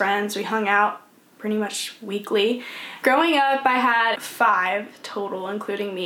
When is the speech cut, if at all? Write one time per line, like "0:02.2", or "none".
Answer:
0:04.2